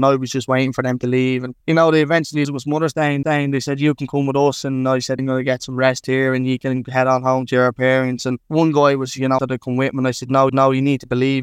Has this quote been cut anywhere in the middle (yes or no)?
yes